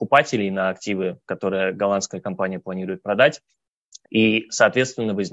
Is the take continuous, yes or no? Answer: yes